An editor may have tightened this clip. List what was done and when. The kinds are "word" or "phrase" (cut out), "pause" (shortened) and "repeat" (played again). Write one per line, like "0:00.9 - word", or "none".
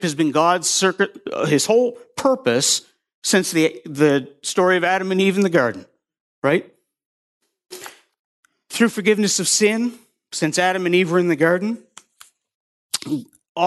none